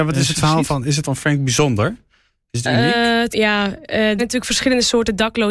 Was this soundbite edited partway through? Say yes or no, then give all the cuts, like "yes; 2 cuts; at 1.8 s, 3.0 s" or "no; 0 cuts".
yes; 3 cuts; at 1.0 s, 3.3 s, 4.2 s